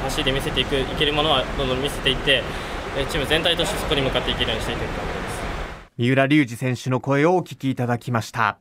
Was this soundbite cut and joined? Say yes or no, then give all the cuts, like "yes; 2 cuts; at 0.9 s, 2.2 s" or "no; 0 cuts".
yes; 1 cut; at 5.9 s